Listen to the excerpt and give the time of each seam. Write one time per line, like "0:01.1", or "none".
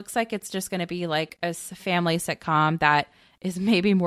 0:01.8